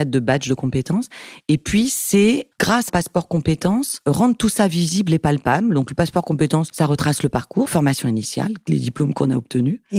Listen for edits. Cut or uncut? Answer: cut